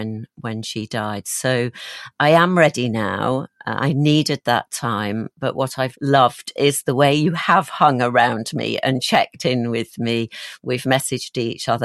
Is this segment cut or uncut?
cut